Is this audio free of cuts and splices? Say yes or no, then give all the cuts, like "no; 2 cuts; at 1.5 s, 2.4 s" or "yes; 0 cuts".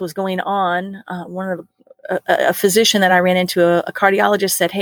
yes; 0 cuts